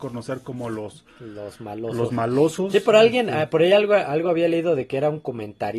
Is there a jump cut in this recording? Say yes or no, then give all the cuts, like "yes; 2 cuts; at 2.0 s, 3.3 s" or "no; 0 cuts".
no; 0 cuts